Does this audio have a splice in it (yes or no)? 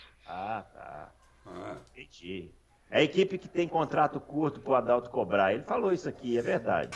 no